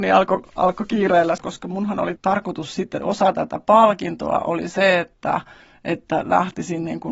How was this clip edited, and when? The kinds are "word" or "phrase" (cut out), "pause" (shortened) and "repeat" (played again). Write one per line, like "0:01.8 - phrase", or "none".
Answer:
0:01.4 - phrase
0:02.2 - word